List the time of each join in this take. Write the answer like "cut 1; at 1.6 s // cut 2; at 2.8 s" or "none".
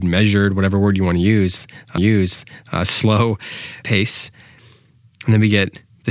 cut 1; at 2.0 s